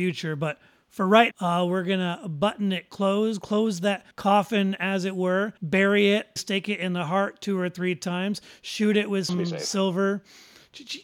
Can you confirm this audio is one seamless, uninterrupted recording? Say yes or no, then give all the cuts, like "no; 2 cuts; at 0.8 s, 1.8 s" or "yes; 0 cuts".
no; 5 cuts; at 1.3 s, 4.1 s, 5.6 s, 6.4 s, 9.3 s